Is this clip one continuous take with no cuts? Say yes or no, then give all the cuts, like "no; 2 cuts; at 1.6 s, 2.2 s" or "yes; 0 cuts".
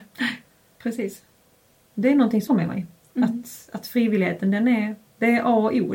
no; 1 cut; at 2.5 s